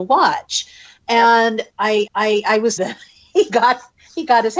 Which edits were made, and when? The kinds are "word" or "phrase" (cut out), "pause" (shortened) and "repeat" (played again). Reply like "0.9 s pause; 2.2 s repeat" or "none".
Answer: 2.1 s repeat; 2.8 s word